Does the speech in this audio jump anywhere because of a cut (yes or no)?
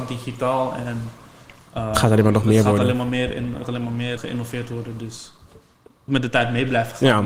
yes